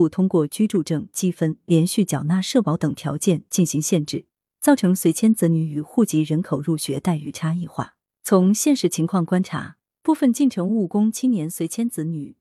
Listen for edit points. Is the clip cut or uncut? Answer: uncut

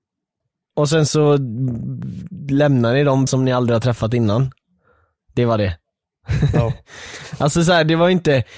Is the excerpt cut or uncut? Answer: cut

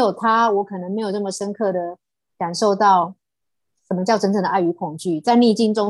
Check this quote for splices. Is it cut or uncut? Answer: uncut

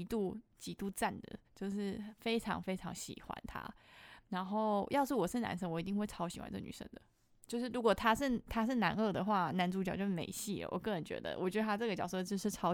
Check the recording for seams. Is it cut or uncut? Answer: cut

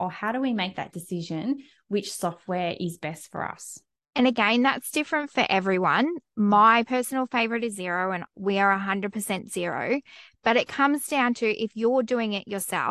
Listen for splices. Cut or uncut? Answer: uncut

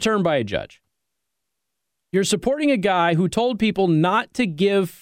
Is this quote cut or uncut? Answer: uncut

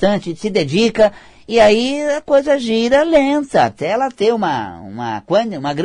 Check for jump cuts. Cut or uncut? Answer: uncut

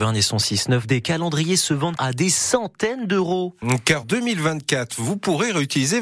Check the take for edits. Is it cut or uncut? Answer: cut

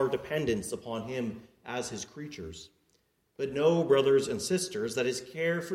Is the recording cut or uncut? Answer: uncut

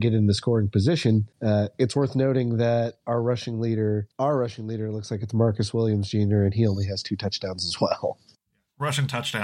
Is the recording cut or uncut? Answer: cut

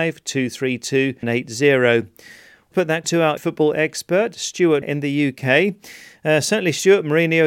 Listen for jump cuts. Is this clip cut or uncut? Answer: cut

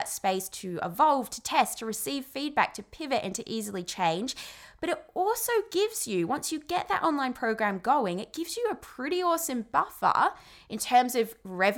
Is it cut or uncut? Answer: uncut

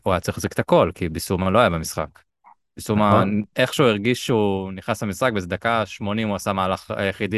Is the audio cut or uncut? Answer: uncut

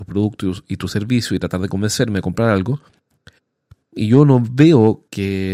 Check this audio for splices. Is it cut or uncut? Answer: uncut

